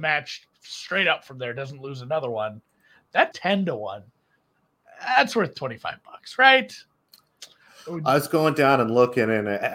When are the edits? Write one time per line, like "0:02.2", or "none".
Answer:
0:03.3